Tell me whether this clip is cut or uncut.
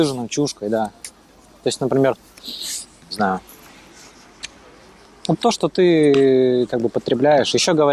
cut